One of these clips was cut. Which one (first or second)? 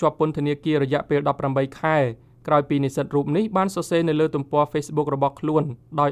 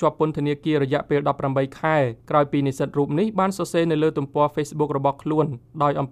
second